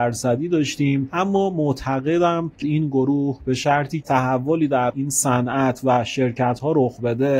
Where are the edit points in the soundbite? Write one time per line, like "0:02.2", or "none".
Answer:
0:02.6
0:04.0